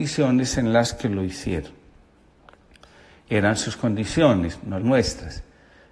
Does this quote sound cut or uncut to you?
cut